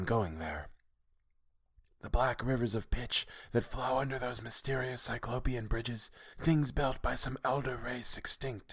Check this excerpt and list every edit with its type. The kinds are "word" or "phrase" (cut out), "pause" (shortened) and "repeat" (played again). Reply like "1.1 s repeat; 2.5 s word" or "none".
6.3 s pause